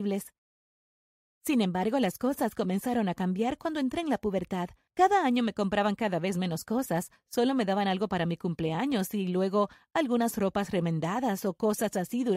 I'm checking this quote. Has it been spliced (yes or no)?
no